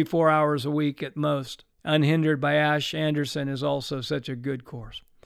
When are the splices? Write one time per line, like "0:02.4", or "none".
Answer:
0:01.7